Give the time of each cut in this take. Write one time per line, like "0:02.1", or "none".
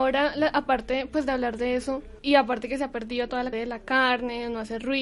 0:02.2
0:03.5